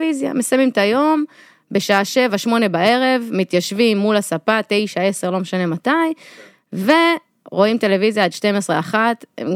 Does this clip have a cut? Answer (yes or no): no